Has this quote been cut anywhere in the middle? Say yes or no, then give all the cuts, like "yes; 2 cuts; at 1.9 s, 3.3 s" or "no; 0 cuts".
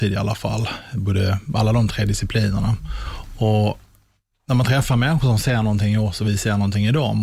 no; 0 cuts